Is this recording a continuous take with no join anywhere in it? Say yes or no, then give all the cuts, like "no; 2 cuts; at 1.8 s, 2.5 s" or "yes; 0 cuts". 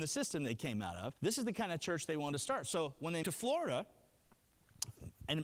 no; 2 cuts; at 1.2 s, 3.2 s